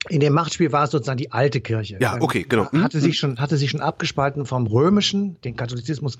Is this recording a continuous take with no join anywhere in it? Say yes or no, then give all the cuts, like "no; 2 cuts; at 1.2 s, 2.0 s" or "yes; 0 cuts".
yes; 0 cuts